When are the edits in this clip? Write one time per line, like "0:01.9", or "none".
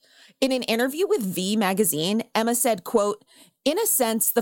none